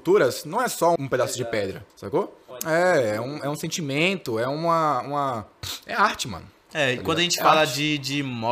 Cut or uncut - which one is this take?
cut